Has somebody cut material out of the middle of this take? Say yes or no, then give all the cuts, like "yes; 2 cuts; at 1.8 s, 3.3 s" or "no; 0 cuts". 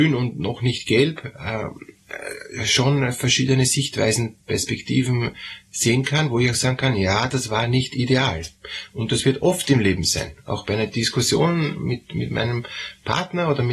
no; 0 cuts